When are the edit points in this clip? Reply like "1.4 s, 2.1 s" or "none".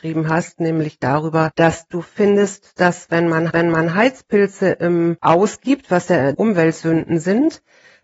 3.5 s, 6.3 s